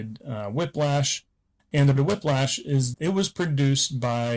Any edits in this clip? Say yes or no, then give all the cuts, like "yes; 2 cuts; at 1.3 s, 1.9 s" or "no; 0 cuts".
yes; 2 cuts; at 2.0 s, 2.9 s